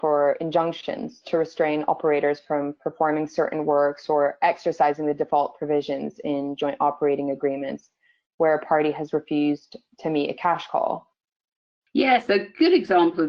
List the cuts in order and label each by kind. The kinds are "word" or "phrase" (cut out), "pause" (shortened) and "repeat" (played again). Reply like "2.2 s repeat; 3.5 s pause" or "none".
none